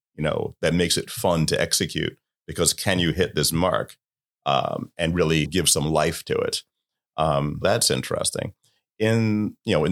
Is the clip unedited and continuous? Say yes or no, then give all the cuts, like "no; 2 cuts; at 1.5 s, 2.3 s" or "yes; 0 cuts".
no; 2 cuts; at 5.5 s, 7.6 s